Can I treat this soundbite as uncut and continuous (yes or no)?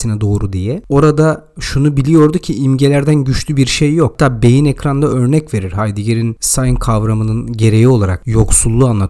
yes